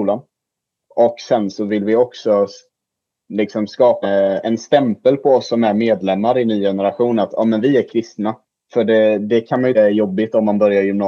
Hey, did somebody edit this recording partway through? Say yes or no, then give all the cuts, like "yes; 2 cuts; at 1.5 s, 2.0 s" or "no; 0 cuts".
yes; 3 cuts; at 4.0 s, 8.4 s, 9.7 s